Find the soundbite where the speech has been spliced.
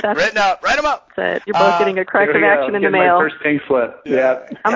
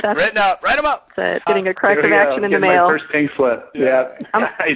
second; 1 cut; at 1.5 s

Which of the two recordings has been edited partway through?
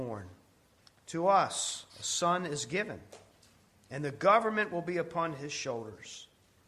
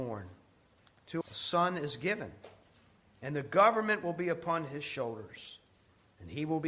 second; 1 cut; at 1.2 s

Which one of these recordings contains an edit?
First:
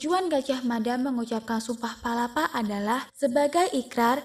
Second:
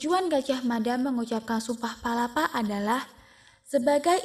first; 1 cut; at 3.1 s

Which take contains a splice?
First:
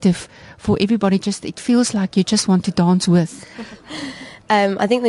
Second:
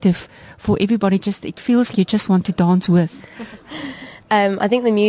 second; 1 cut; at 1.9 s

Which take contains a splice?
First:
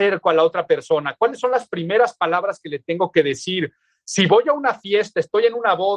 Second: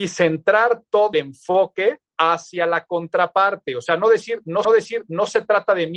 second; 3 cuts; at 1.1 s, 2.0 s, 4.6 s

